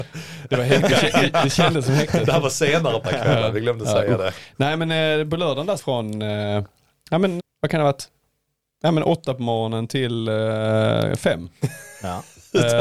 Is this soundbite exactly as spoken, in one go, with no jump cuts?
no; 3 cuts; at 3.0 s, 5.8 s, 7.4 s

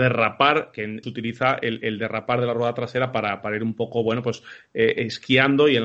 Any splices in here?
yes; 1 cut; at 1.0 s

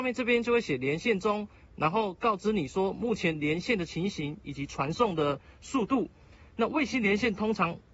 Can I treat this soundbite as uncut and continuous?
yes; 0 cuts

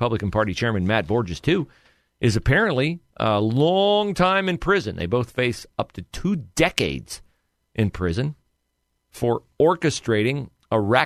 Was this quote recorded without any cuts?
yes; 0 cuts

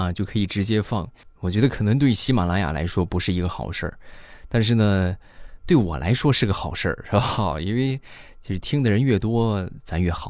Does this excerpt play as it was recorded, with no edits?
no; 1 cut; at 1.4 s

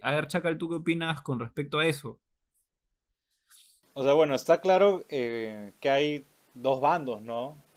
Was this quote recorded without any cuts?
yes; 0 cuts

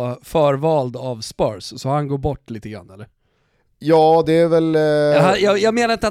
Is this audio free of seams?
yes; 0 cuts

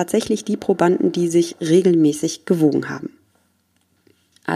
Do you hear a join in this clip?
no; 0 cuts

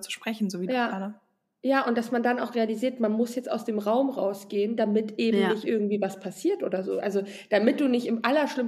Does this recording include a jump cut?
no; 0 cuts

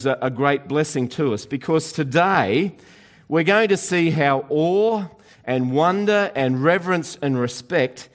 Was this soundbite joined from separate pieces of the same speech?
no; 0 cuts

